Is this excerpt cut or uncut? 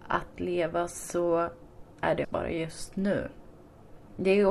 cut